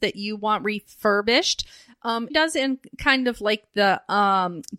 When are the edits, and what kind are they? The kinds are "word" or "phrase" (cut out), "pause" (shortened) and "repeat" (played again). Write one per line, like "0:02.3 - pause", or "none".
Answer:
0:02.3 - word